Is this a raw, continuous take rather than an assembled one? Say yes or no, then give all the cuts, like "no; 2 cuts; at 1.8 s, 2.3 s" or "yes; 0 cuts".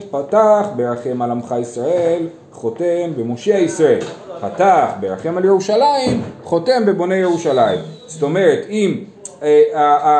yes; 0 cuts